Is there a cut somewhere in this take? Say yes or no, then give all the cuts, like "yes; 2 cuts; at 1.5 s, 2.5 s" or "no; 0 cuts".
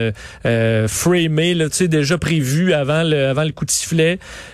no; 0 cuts